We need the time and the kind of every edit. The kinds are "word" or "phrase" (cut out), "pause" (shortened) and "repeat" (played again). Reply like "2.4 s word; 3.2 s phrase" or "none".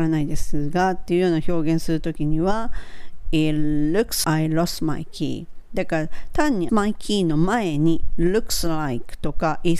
4.2 s word; 6.7 s phrase; 8.1 s word